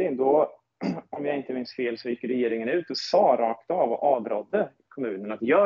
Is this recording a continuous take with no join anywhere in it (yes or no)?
yes